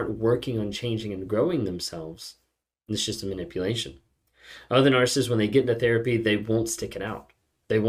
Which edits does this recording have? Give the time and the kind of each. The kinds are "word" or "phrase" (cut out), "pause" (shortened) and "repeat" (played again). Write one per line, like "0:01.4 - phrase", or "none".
none